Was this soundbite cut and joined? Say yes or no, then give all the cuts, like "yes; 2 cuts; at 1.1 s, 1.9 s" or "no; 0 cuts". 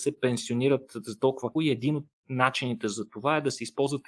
yes; 1 cut; at 1.6 s